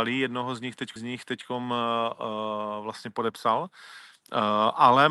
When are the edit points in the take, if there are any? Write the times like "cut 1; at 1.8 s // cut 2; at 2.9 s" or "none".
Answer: cut 1; at 1.0 s